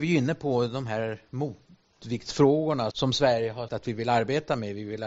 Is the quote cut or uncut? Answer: cut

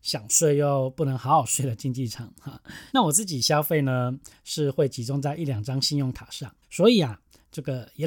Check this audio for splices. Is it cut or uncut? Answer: cut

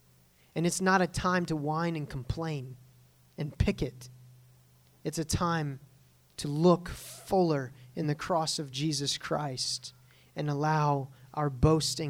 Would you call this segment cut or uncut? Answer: uncut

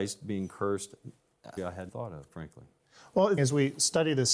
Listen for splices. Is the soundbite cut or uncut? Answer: cut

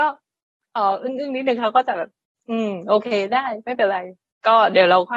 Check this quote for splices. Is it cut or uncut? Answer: uncut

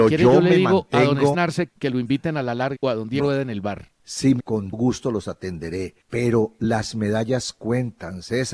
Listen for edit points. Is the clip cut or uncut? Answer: cut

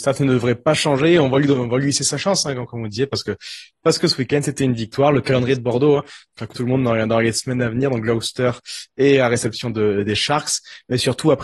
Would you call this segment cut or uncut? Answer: cut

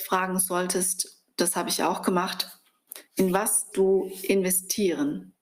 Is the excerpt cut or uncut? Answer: cut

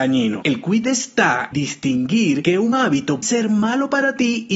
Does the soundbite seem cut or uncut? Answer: cut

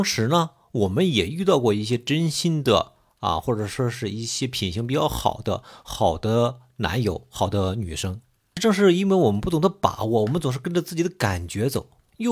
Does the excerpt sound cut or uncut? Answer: uncut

